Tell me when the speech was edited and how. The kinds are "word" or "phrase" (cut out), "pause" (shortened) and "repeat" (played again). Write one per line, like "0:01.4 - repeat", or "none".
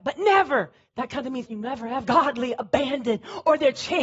0:01.5 - word
0:02.0 - phrase